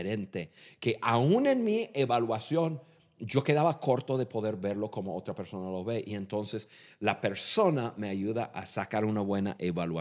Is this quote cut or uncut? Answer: uncut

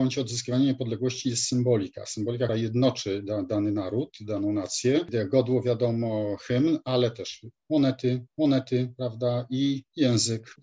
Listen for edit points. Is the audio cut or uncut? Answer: cut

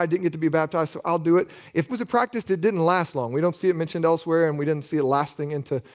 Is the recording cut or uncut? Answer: cut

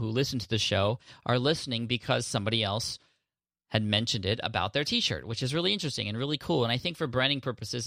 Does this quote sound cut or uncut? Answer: uncut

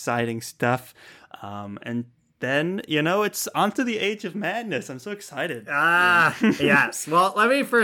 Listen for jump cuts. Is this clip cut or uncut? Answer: uncut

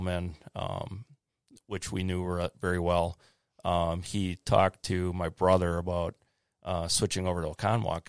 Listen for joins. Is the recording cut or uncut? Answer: uncut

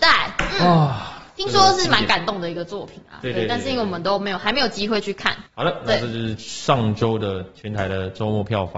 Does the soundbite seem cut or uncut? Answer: cut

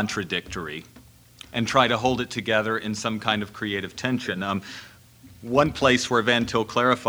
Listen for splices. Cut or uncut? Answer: uncut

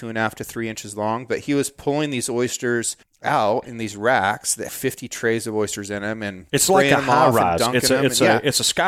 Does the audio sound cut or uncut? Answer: cut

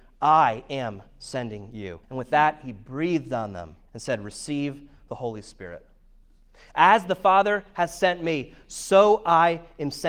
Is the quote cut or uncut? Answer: cut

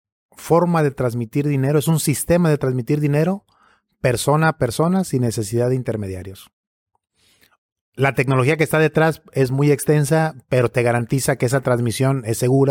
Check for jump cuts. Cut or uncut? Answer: uncut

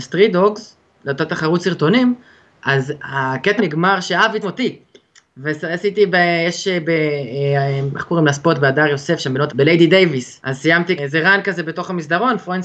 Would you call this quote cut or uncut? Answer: cut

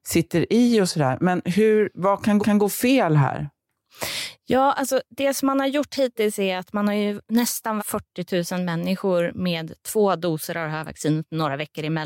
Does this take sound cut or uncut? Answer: cut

